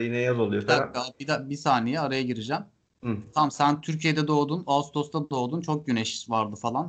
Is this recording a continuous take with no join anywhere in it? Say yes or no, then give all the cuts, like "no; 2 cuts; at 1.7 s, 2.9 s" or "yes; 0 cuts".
yes; 0 cuts